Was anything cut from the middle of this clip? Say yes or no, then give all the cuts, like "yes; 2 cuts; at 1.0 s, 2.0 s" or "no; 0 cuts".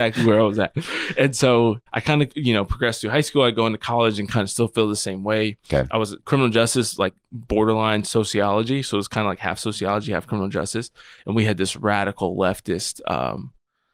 yes; 2 cuts; at 1.9 s, 6.2 s